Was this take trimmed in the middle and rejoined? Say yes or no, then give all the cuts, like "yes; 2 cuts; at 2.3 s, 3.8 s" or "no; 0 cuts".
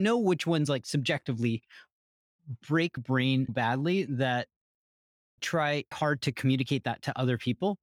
yes; 4 cuts; at 3.0 s, 3.5 s, 5.4 s, 5.9 s